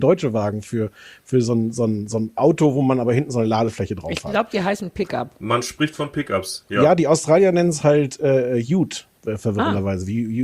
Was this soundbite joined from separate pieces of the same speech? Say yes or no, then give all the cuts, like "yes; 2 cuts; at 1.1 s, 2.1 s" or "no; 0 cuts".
no; 0 cuts